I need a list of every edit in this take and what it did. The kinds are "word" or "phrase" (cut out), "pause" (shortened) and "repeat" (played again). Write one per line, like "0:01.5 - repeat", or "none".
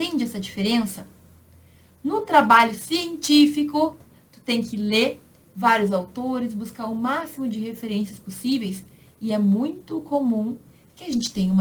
none